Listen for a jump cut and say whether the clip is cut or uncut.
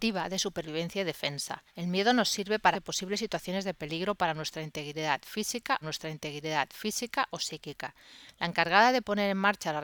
cut